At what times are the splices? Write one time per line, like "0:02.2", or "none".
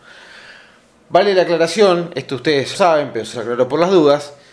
0:02.7
0:03.3